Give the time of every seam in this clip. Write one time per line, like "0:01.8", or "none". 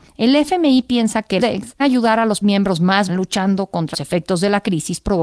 0:01.4
0:01.8
0:02.4
0:03.1
0:03.9